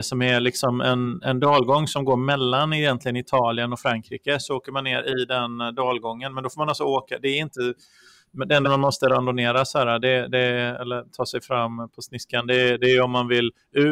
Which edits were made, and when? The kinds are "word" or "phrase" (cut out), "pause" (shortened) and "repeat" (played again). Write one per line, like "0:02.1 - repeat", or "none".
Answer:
0:08.6 - word